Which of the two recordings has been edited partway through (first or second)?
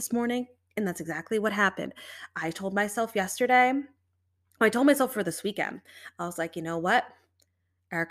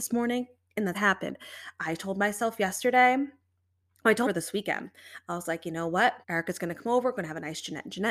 second